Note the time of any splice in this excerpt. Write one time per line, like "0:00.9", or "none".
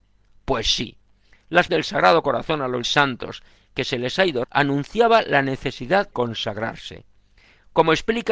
0:01.7
0:02.8
0:04.4
0:06.1